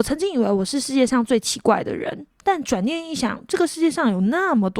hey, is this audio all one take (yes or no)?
no